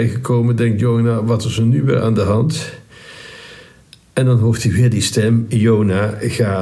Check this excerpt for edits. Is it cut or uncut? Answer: uncut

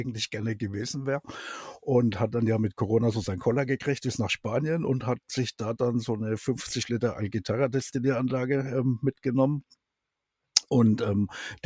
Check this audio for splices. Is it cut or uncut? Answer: uncut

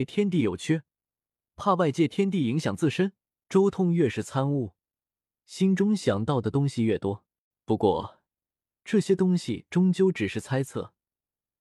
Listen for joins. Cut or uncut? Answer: cut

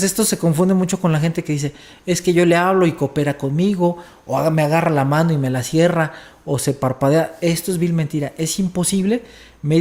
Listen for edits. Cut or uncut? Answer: uncut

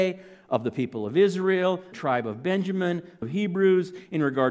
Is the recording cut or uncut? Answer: cut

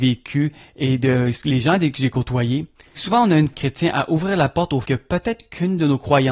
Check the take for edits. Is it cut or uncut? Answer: cut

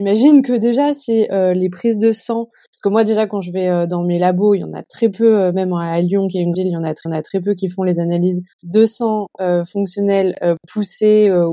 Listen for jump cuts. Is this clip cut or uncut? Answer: cut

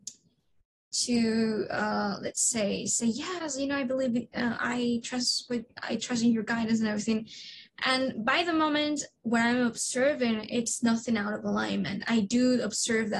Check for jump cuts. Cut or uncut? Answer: uncut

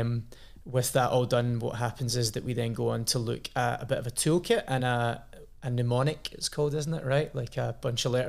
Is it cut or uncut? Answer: uncut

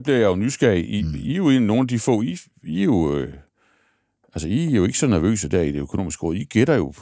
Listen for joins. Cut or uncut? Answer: uncut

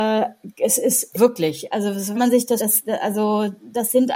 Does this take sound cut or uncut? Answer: cut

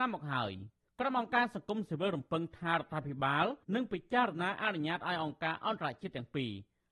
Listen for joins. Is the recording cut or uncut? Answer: cut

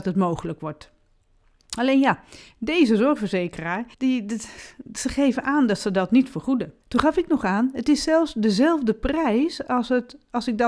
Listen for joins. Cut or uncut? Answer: cut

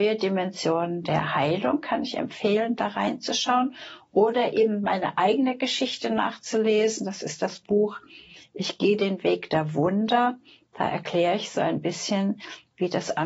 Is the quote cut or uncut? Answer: uncut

